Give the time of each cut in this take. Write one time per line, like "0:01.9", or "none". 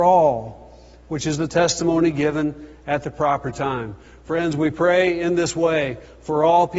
none